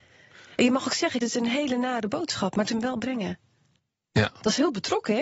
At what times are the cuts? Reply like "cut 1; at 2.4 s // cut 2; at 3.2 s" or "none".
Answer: cut 1; at 1.2 s // cut 2; at 2.7 s // cut 3; at 3.8 s

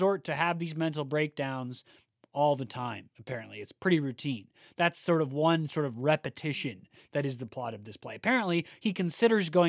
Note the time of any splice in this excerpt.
none

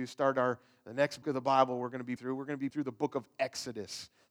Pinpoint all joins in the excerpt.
cut 1; at 1.2 s // cut 2; at 2.2 s // cut 3; at 2.7 s

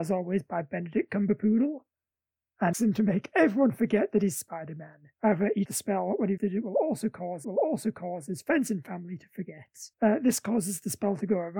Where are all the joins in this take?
cut 1; at 2.7 s // cut 2; at 5.1 s // cut 3; at 5.7 s // cut 4; at 6.4 s // cut 5; at 7.4 s // cut 6; at 9.9 s

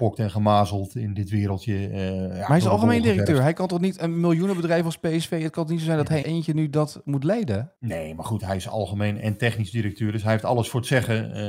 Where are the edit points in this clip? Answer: cut 1; at 6.2 s // cut 2; at 7.8 s

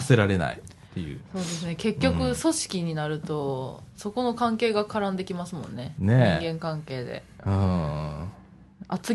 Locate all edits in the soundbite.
none

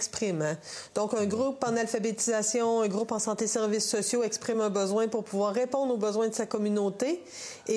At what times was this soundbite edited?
none

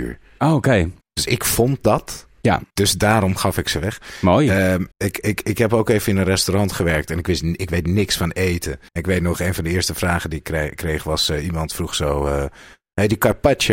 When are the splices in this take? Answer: cut 1; at 1.0 s // cut 2; at 2.7 s // cut 3; at 4.9 s // cut 4; at 8.9 s

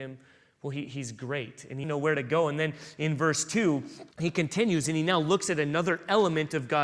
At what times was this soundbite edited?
cut 1; at 1.8 s // cut 2; at 4.1 s

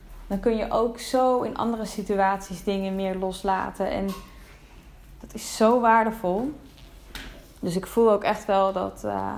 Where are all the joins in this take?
none

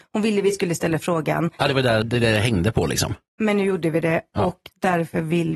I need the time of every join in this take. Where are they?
cut 1; at 2.0 s

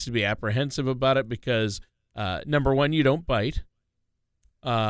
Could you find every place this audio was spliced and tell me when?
none

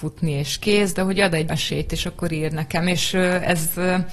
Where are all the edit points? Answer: cut 1; at 1.5 s

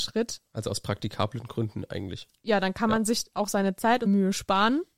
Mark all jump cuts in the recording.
cut 1; at 4.1 s

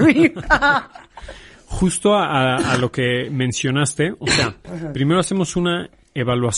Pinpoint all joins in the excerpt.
none

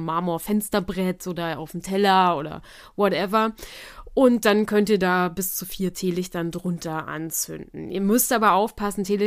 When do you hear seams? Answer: none

